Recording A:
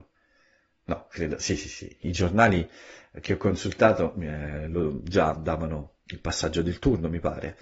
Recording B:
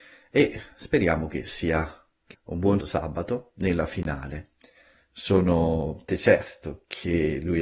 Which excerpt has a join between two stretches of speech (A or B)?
B